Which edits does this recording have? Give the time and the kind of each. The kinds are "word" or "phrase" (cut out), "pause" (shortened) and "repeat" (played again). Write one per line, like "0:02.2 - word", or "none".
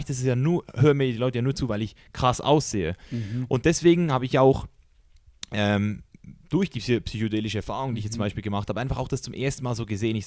none